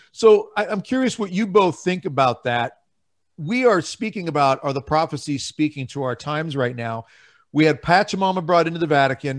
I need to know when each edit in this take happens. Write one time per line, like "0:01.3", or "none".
none